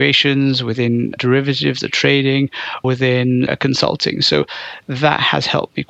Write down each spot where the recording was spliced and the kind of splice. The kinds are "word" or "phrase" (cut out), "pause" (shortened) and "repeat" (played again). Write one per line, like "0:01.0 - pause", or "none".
0:01.2 - word
0:02.8 - word
0:03.5 - word